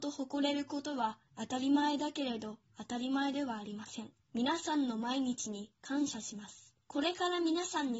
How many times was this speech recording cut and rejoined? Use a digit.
3